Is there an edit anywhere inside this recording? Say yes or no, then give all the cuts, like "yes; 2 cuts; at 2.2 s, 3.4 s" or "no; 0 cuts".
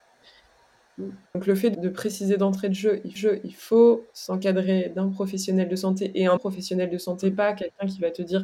yes; 4 cuts; at 1.3 s, 1.7 s, 3.2 s, 6.4 s